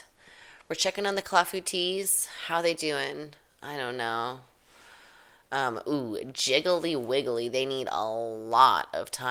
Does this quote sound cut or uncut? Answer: uncut